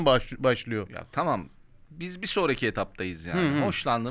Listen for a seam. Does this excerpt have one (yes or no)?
no